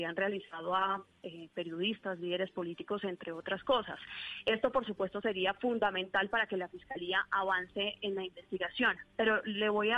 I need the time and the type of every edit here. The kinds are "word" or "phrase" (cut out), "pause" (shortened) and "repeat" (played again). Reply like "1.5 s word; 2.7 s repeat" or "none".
none